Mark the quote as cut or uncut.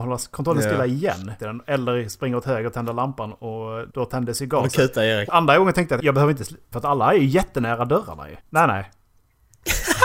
cut